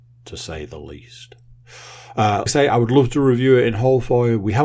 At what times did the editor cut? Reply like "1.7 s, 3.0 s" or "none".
2.5 s